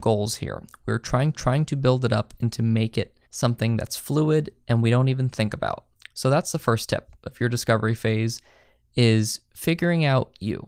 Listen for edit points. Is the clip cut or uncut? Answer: cut